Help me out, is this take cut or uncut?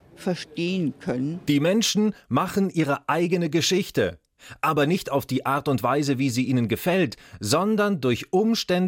uncut